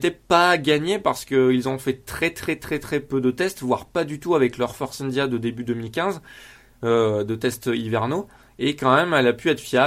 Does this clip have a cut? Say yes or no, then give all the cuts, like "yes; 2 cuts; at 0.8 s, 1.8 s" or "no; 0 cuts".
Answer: no; 0 cuts